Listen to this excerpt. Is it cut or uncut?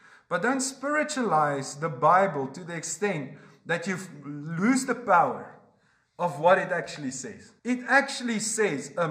cut